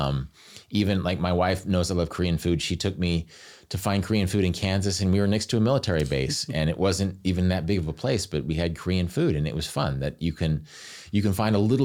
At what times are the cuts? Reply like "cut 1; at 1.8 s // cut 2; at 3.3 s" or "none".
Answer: none